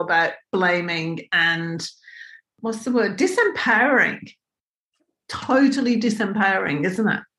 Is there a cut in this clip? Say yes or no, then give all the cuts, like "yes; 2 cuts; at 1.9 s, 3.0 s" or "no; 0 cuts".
no; 0 cuts